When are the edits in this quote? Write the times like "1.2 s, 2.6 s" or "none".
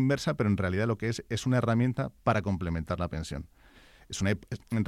none